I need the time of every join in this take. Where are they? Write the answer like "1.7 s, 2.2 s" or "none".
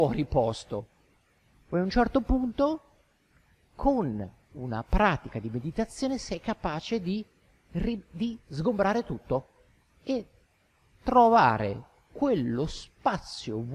none